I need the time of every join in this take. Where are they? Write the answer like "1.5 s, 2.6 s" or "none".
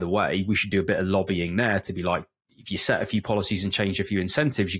none